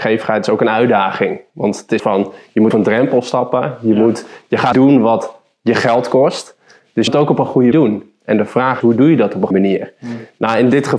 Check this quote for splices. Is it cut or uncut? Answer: cut